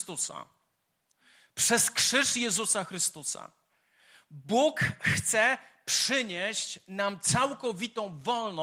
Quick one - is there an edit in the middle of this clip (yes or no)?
no